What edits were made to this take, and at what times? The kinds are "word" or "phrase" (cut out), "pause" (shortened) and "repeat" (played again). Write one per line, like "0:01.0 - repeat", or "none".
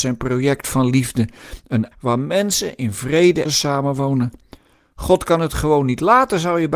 0:01.9 - word
0:03.4 - phrase